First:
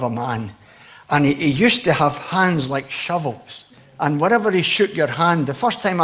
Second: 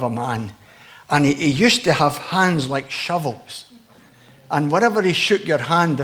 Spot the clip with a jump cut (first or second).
first